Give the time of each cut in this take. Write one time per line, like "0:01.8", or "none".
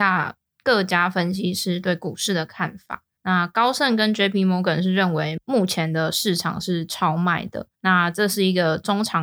0:03.2
0:07.7